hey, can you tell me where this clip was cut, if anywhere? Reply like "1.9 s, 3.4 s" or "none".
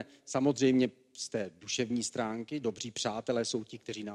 none